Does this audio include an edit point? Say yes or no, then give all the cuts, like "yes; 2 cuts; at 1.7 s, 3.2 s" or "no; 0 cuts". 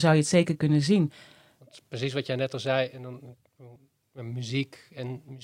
no; 0 cuts